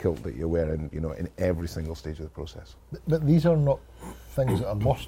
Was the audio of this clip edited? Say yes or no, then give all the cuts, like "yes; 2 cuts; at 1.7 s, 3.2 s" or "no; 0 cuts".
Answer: yes; 1 cut; at 2.8 s